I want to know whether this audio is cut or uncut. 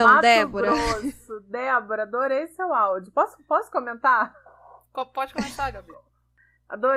uncut